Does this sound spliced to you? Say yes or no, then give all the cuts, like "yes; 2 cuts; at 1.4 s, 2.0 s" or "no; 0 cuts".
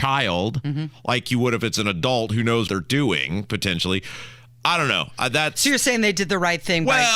yes; 1 cut; at 2.7 s